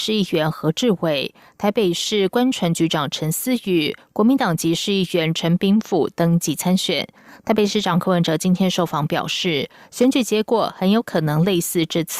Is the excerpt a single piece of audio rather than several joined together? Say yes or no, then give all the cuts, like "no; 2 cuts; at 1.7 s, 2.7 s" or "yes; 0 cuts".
yes; 0 cuts